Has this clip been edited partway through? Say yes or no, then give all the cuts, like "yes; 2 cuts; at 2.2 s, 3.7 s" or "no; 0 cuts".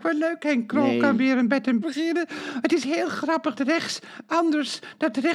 yes; 2 cuts; at 1.8 s, 3.6 s